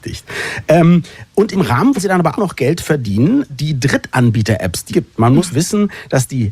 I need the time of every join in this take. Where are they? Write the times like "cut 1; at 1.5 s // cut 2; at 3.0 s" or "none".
cut 1; at 1.5 s // cut 2; at 1.9 s // cut 3; at 2.4 s // cut 4; at 3.5 s // cut 5; at 4.9 s // cut 6; at 5.5 s